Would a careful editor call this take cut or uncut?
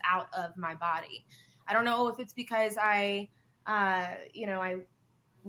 uncut